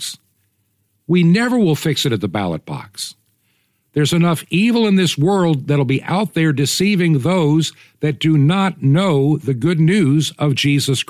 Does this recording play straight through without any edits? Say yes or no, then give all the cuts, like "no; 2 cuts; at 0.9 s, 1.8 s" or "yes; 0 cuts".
yes; 0 cuts